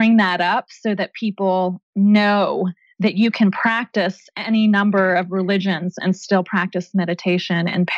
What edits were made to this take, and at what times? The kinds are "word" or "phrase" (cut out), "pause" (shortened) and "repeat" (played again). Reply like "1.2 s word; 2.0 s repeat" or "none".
1.8 s pause